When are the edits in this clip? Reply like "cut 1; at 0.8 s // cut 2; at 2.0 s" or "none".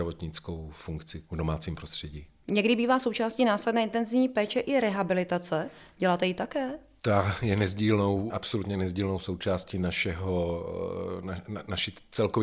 cut 1; at 8.3 s